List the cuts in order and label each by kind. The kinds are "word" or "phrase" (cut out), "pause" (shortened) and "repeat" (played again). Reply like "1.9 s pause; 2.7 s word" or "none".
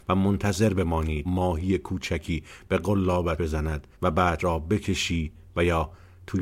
1.2 s word; 3.4 s word; 3.9 s pause; 4.4 s word